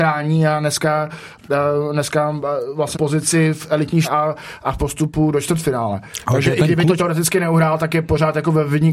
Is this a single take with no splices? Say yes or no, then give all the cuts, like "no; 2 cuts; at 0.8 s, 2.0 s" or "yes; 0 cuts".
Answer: no; 4 cuts; at 2.9 s, 4.0 s, 4.8 s, 7.0 s